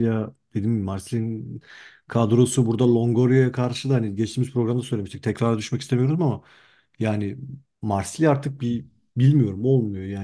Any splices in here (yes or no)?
no